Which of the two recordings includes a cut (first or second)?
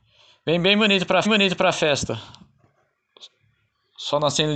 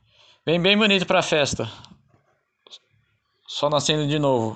first